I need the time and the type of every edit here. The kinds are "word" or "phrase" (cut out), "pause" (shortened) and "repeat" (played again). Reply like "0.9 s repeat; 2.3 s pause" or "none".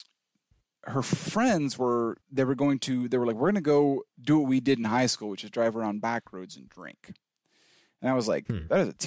2.2 s pause; 4.1 s pause

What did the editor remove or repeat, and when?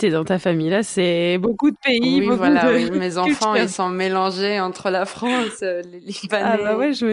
none

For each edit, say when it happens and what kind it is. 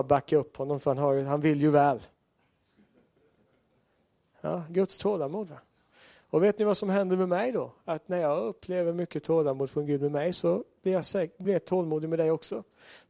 none

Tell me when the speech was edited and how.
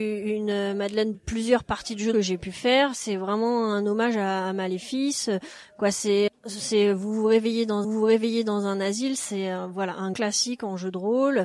1.1 s phrase; 2.1 s phrase; 6.3 s word; 7.8 s repeat; 10.1 s word

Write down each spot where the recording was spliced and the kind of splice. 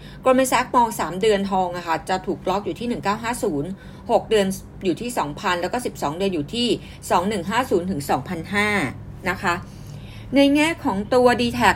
none

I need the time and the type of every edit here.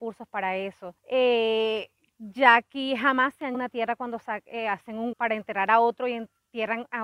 1.0 s pause; 3.5 s word; 5.1 s word

